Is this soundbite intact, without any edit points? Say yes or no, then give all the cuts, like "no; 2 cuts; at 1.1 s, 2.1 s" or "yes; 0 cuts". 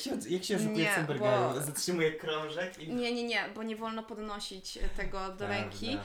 yes; 0 cuts